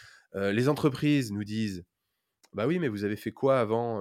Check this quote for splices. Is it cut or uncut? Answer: uncut